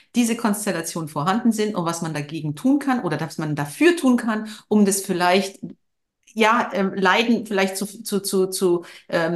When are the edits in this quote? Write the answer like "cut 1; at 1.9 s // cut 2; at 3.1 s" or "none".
cut 1; at 6.0 s